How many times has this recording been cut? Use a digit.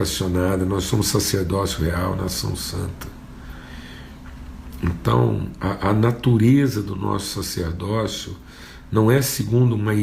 0